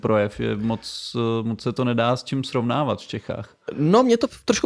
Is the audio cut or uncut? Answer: uncut